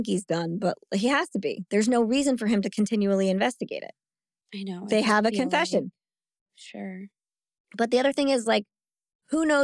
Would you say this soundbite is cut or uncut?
uncut